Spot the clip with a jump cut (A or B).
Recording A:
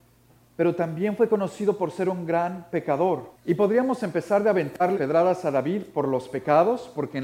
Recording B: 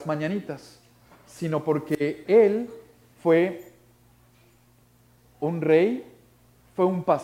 A